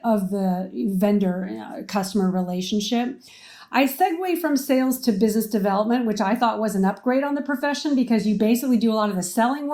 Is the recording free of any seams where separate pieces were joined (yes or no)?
yes